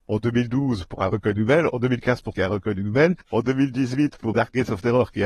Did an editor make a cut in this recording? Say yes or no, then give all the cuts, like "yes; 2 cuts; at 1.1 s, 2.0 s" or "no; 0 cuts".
yes; 3 cuts; at 2.3 s, 3.2 s, 4.3 s